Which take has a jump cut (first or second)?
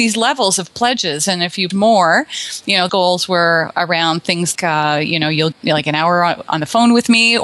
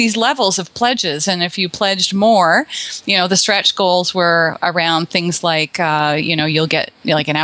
first